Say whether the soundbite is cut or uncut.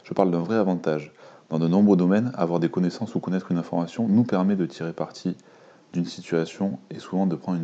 uncut